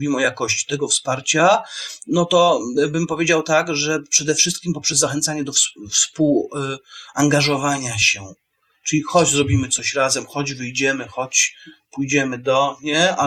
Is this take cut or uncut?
uncut